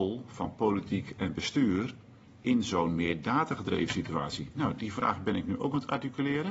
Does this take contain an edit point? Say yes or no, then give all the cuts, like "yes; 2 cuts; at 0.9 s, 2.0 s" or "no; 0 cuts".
no; 0 cuts